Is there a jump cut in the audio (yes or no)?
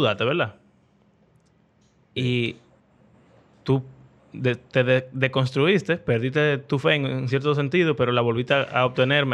no